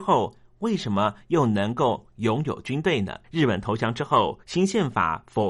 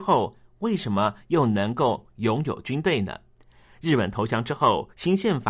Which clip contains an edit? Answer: first; 1 cut; at 3.2 s

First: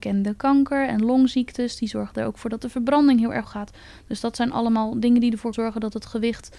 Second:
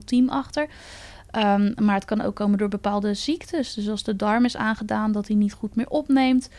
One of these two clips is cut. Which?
first; 2 cuts; at 3.4 s, 5.5 s

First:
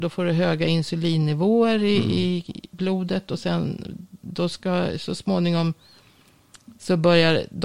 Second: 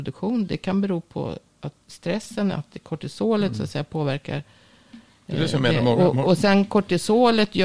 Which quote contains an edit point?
second; 1 cut; at 1.8 s

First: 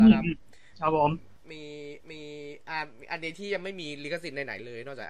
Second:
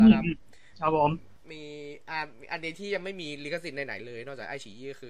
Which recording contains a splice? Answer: first; 1 cut; at 2.0 s

